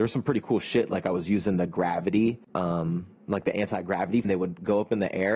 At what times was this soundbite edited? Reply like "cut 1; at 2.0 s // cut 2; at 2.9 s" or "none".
cut 1; at 2.4 s // cut 2; at 4.2 s